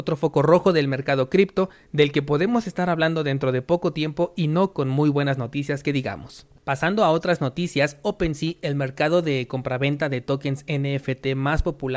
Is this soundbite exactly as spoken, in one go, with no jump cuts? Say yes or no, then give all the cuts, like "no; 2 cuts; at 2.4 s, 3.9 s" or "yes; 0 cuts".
no; 1 cut; at 6.6 s